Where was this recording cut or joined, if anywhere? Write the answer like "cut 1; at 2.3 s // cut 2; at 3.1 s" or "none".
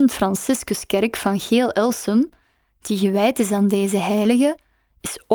none